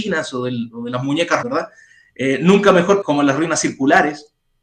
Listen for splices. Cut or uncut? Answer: cut